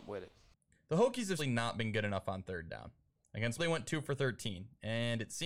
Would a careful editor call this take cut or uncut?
cut